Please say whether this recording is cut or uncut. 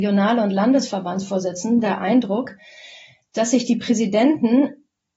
uncut